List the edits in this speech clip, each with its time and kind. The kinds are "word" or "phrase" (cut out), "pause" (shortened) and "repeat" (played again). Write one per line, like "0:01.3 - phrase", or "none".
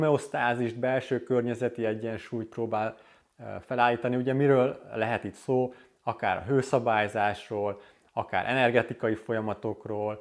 none